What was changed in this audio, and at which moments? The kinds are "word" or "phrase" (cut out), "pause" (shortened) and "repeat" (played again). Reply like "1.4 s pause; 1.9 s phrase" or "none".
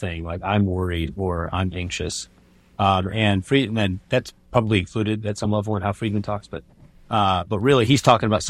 none